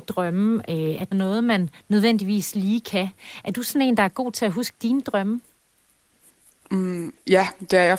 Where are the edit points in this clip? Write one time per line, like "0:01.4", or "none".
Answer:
0:01.1